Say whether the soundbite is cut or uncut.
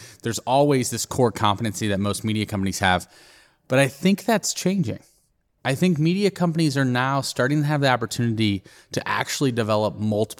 uncut